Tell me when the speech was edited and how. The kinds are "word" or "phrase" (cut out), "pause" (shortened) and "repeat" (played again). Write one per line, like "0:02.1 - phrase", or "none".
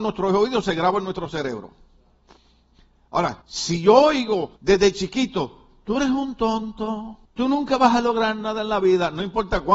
0:03.4 - pause
0:04.6 - pause
0:07.3 - pause